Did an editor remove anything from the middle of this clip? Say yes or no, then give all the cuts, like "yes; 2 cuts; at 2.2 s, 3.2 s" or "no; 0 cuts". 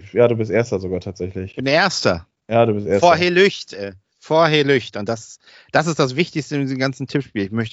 no; 0 cuts